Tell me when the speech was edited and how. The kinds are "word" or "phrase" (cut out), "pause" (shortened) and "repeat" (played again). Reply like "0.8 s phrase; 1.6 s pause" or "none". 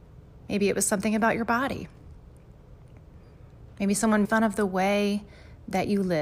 4.2 s word